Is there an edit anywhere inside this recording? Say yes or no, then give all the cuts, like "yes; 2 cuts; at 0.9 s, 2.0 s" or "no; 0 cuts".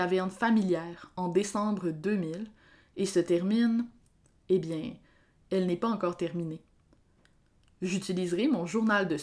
no; 0 cuts